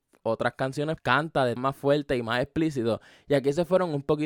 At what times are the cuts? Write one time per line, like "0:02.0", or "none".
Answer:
0:01.0
0:01.6